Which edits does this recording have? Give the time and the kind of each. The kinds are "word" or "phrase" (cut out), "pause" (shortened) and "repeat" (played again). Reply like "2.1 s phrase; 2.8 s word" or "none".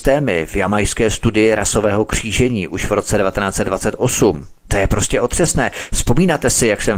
4.6 s pause